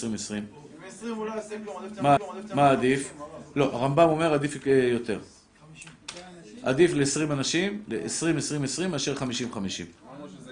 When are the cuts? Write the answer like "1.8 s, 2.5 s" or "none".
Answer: 2.2 s